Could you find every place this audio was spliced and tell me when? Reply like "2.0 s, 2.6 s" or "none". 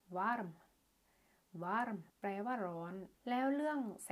2.1 s, 3.2 s